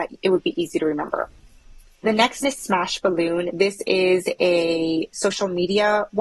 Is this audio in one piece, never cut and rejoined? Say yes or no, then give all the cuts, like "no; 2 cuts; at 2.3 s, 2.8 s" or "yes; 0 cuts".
no; 2 cuts; at 2.0 s, 2.4 s